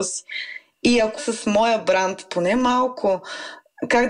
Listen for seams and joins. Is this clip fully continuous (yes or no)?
no